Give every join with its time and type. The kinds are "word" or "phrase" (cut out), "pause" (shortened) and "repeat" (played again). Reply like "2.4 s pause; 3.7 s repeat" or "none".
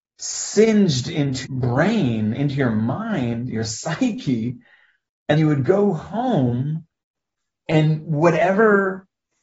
1.4 s word; 5.4 s word